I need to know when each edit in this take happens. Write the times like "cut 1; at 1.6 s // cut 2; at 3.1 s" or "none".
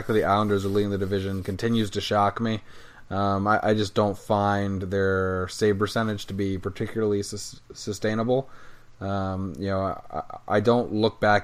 none